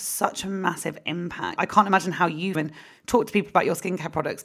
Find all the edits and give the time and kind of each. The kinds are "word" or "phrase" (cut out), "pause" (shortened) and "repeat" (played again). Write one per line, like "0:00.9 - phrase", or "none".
0:01.6 - word
0:02.5 - phrase

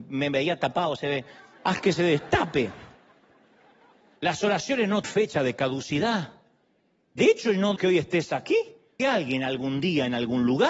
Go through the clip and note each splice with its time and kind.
0:05.0 - word
0:07.8 - word
0:09.0 - word

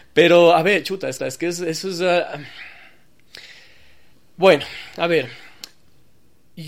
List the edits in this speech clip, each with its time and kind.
0:01.2 - repeat
0:04.1 - pause

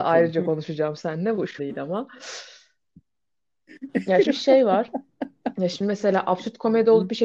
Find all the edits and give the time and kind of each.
0:01.6 - word
0:04.3 - word

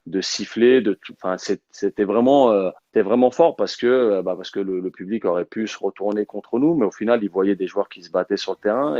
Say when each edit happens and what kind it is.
0:02.8 - pause

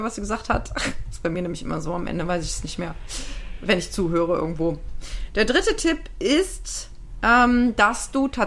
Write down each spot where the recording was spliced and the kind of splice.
none

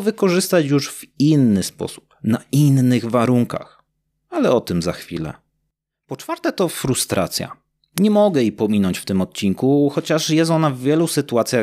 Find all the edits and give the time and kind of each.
none

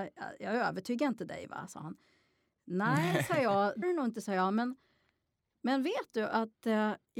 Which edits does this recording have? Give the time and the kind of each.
0:03.8 - word

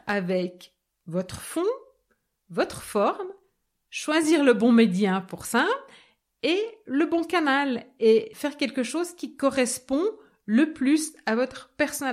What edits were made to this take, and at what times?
0:08.3 - word

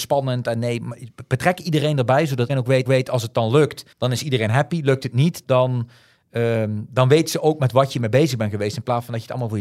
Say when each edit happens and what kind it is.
0:02.5 - word
0:02.8 - repeat
0:03.9 - pause
0:05.4 - word

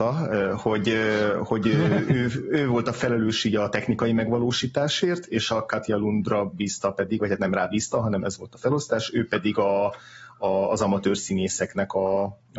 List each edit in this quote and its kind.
none

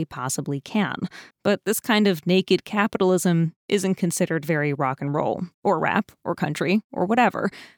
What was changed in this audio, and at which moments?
0:01.3 - pause
0:05.5 - pause

